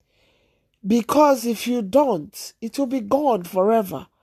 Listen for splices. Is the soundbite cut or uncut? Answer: uncut